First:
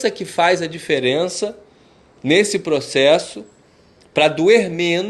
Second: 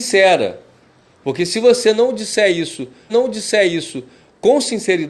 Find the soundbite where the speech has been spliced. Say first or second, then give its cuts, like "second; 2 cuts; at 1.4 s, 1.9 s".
second; 1 cut; at 3.1 s